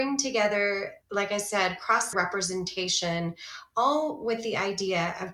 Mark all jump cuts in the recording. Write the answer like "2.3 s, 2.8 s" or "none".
1.0 s, 2.1 s